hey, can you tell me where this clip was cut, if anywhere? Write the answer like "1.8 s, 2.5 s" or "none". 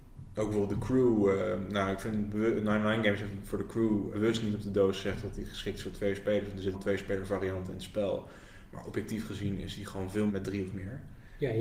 4.1 s, 6.7 s, 10.3 s